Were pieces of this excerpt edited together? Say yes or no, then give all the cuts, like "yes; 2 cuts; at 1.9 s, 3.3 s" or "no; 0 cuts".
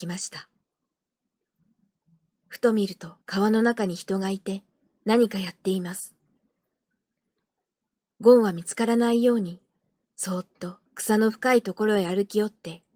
yes; 2 cuts; at 3.2 s, 10.9 s